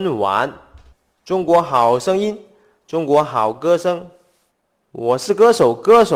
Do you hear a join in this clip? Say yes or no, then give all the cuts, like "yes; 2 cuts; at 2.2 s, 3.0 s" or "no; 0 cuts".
no; 0 cuts